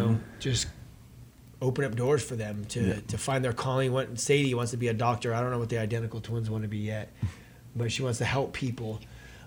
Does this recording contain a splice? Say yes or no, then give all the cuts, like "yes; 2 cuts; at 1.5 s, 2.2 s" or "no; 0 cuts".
no; 0 cuts